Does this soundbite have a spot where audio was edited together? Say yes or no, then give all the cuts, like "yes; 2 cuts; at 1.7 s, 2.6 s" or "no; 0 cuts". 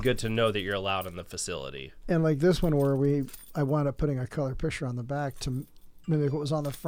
no; 0 cuts